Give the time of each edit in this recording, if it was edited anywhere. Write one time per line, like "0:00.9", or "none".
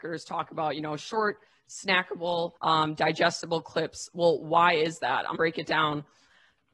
0:02.6
0:05.3